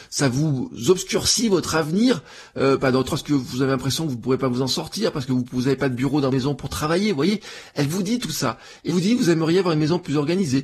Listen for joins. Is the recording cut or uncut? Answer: cut